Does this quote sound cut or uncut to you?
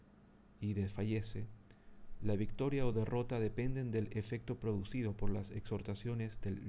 uncut